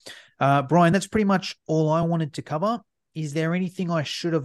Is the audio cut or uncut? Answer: uncut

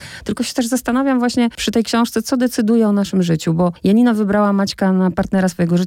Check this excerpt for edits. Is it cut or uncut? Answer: cut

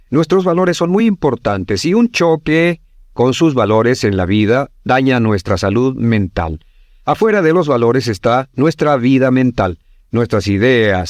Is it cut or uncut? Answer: uncut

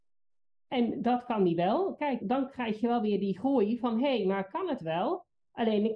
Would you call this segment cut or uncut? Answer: cut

